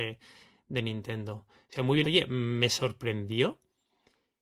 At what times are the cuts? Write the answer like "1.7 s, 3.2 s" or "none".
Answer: 2.0 s